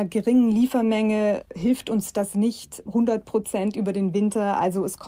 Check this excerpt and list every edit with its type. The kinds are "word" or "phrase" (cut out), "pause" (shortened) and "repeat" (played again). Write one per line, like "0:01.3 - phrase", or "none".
none